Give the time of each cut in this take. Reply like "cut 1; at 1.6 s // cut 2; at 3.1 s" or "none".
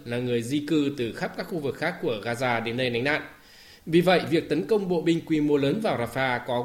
none